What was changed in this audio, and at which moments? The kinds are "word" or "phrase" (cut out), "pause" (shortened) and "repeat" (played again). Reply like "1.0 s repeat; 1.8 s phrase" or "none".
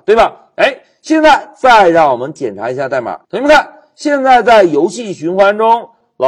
3.2 s pause